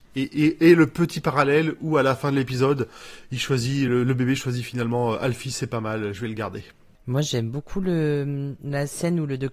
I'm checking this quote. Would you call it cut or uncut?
uncut